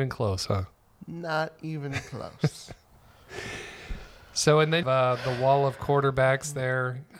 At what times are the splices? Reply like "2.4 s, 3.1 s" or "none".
4.8 s